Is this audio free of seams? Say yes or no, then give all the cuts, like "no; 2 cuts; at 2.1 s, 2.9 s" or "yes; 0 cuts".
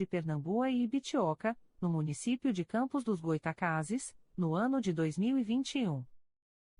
yes; 0 cuts